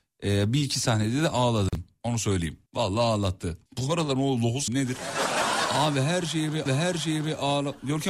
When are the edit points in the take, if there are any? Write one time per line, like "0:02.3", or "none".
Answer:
0:02.7
0:03.7
0:04.2
0:04.7
0:06.7